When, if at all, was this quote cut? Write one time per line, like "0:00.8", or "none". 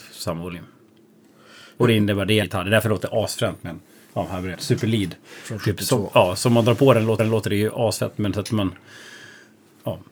0:02.4
0:04.5
0:07.2